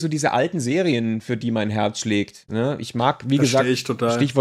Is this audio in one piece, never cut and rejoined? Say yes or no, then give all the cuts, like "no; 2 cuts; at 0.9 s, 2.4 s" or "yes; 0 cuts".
yes; 0 cuts